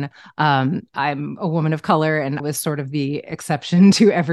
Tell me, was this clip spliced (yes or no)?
yes